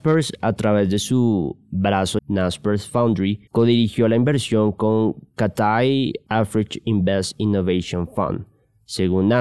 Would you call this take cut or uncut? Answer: cut